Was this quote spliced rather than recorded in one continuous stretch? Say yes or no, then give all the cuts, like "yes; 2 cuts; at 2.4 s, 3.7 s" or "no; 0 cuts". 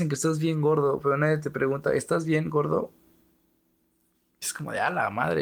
no; 0 cuts